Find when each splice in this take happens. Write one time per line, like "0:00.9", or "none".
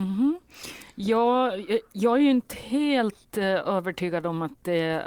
none